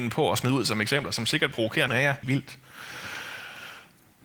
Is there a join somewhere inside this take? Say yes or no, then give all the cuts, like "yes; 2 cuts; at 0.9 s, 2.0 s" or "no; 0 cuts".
yes; 3 cuts; at 1.5 s, 1.9 s, 2.2 s